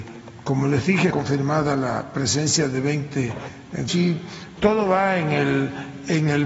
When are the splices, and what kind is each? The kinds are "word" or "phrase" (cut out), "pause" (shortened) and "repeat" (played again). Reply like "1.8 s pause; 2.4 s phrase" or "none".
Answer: 1.1 s word; 3.9 s word; 4.6 s word